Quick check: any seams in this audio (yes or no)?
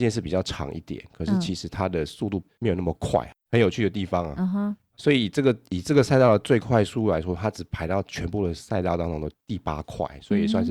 no